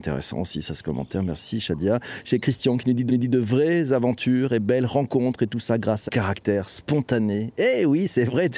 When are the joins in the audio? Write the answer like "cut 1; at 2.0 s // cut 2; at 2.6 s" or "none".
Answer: cut 1; at 3.1 s // cut 2; at 6.1 s